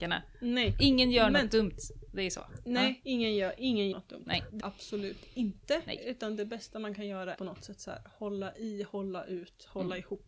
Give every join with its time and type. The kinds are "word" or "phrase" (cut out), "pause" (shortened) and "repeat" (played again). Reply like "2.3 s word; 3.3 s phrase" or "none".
3.9 s word; 4.6 s word; 7.4 s phrase